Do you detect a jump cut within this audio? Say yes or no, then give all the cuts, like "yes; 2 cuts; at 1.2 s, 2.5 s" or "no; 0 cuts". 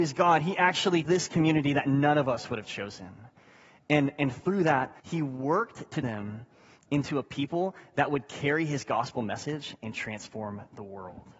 yes; 3 cuts; at 1.0 s, 5.0 s, 6.0 s